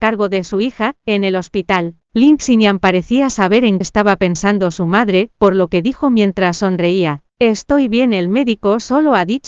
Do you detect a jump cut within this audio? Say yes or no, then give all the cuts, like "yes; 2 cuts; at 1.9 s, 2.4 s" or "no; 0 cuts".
yes; 3 cuts; at 2.0 s, 3.8 s, 7.3 s